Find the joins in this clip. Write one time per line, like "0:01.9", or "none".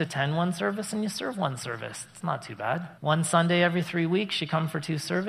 0:03.0